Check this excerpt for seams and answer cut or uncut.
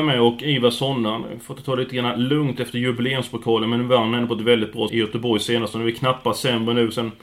cut